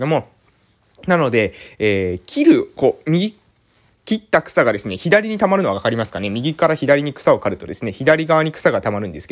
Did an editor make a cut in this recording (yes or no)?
no